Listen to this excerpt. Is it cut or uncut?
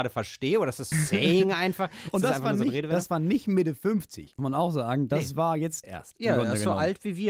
cut